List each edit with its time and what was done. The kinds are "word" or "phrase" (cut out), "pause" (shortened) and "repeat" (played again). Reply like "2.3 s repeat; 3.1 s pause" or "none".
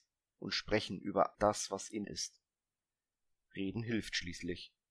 1.3 s word; 2.0 s phrase